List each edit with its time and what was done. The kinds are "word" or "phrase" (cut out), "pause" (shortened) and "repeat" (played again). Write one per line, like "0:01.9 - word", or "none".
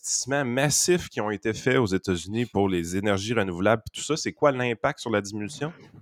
none